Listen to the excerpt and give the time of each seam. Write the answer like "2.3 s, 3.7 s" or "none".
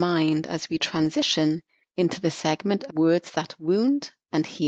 2.9 s